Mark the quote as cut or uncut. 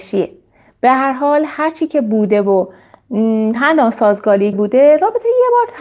cut